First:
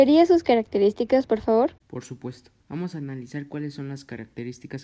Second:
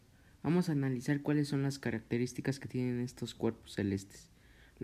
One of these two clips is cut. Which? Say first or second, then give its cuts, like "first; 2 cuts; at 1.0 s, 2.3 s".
first; 2 cuts; at 1.8 s, 2.6 s